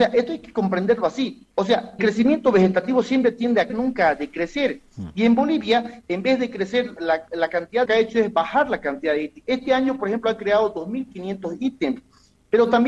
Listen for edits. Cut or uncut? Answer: cut